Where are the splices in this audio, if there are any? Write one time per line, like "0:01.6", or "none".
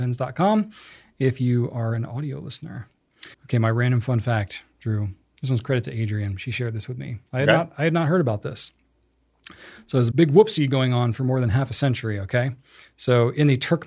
0:03.3
0:10.1